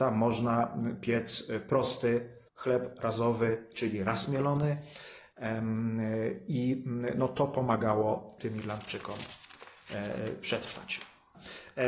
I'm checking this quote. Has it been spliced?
yes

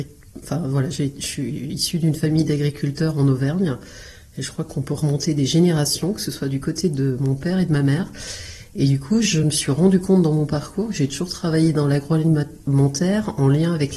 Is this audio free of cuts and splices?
yes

